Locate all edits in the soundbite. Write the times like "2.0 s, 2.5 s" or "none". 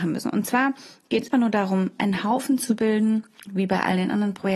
1.3 s, 2.0 s